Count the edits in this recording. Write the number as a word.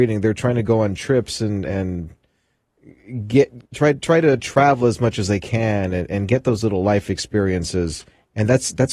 one